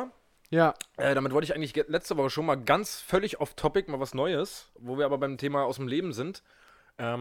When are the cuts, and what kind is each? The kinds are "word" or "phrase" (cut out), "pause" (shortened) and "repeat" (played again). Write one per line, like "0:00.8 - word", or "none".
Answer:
0:04.8 - pause